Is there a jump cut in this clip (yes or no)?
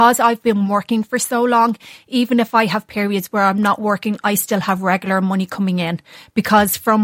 no